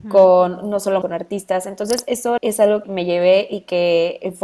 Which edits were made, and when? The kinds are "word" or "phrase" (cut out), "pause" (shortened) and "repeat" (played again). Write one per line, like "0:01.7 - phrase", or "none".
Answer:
0:01.0 - word
0:02.4 - phrase
0:02.8 - word